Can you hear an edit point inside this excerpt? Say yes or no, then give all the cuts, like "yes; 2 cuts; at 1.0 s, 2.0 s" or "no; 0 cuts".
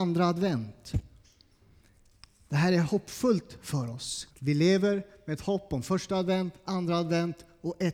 yes; 1 cut; at 4.3 s